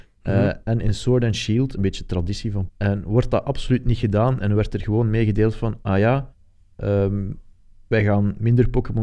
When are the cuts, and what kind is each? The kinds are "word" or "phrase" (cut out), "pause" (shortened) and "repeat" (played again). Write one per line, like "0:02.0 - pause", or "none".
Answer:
0:02.7 - word